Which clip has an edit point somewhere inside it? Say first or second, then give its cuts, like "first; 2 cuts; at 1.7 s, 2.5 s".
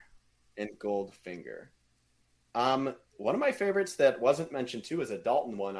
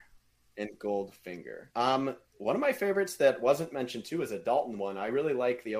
second; 1 cut; at 1.7 s